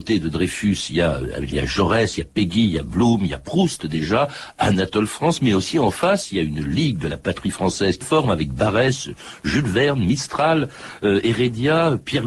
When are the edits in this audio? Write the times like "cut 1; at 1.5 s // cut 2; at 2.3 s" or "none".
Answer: cut 1; at 1.5 s // cut 2; at 8.0 s